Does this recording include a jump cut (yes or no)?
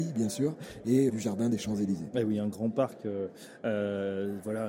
yes